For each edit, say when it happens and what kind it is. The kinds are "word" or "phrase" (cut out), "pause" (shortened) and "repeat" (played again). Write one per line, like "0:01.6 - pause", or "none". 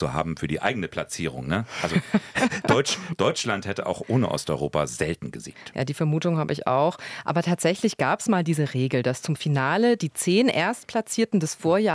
none